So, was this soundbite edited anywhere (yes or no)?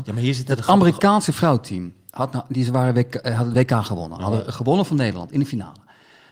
no